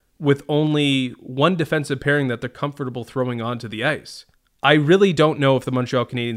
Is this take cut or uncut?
cut